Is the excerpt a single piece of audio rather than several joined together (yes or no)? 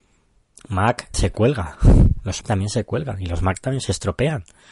no